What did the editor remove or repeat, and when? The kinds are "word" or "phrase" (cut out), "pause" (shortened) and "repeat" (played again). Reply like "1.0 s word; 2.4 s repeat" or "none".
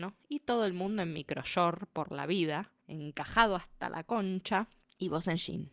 none